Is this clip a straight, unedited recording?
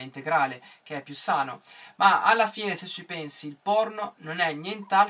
yes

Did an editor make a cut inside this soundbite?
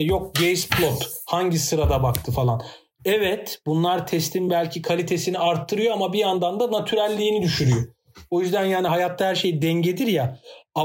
no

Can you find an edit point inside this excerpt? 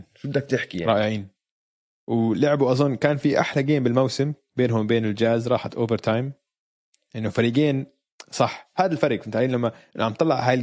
no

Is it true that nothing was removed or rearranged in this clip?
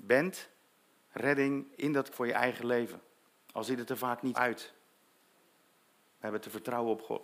no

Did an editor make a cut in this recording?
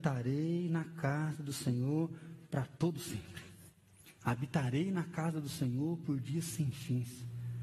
yes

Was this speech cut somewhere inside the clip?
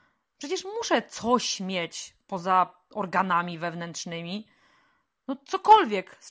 no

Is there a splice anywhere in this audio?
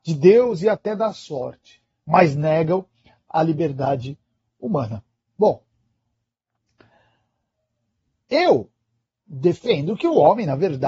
no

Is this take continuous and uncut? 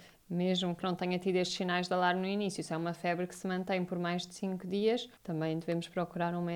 no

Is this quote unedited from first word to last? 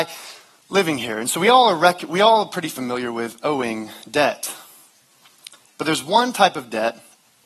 yes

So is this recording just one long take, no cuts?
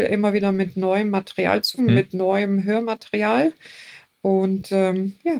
no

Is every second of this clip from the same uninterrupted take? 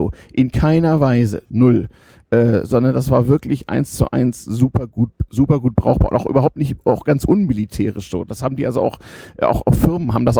yes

